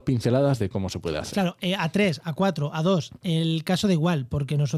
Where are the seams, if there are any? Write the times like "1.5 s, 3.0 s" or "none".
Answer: none